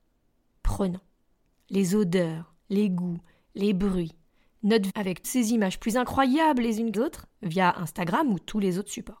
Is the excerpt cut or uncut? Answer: cut